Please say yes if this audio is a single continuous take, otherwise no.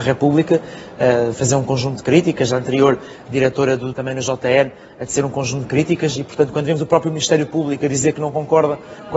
no